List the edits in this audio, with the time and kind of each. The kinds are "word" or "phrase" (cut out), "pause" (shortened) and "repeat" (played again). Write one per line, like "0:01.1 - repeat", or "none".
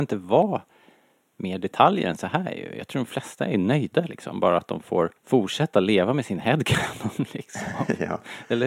0:05.2 - pause